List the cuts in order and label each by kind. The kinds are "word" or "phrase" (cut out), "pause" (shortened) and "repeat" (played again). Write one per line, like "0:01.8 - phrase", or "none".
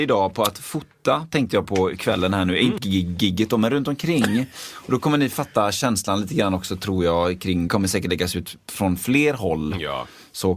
0:02.8 - word
0:07.7 - phrase